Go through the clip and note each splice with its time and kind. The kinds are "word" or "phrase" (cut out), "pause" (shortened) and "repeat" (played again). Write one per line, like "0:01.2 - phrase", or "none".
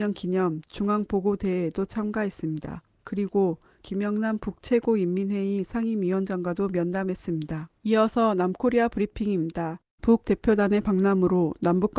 0:07.8 - pause
0:10.2 - word